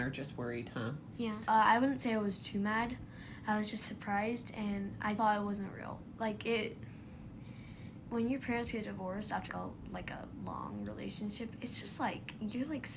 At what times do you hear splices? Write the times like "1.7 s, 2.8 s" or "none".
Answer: 5.2 s, 8.0 s, 9.5 s